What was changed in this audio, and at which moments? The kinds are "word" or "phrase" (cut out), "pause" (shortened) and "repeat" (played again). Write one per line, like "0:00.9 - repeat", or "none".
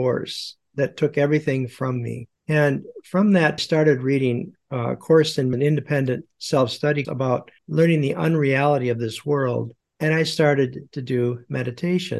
0:02.4 - pause
0:03.6 - phrase
0:05.5 - phrase
0:07.0 - word
0:07.6 - pause
0:09.8 - pause

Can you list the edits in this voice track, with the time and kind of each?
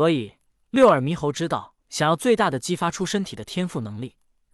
0:01.8 - pause

